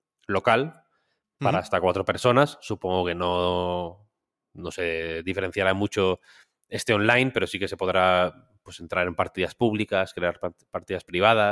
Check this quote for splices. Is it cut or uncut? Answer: uncut